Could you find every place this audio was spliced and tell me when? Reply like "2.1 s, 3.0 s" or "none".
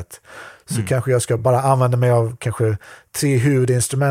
none